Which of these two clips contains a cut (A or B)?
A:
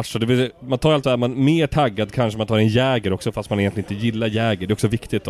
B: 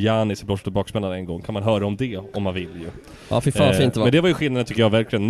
A